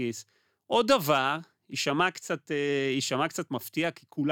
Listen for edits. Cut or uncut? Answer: uncut